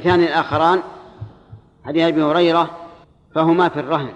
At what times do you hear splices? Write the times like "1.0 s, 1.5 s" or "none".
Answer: 3.0 s